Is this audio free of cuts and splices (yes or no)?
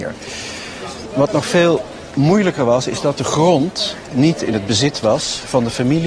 yes